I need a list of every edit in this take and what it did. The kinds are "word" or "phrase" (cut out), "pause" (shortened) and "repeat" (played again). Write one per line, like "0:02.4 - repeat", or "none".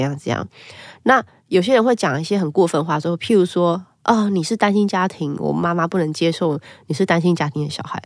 none